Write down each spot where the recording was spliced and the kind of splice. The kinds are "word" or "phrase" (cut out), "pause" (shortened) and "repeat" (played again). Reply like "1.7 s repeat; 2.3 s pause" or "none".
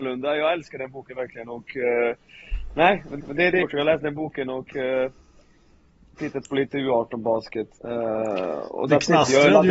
3.2 s repeat; 3.6 s word; 7.8 s pause